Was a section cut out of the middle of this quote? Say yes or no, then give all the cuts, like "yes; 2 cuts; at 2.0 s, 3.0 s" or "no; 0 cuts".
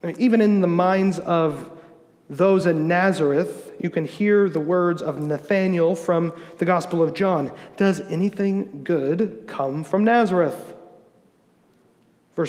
no; 0 cuts